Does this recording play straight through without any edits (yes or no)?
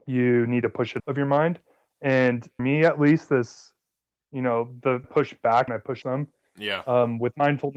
no